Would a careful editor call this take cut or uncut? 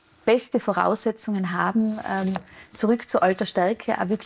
uncut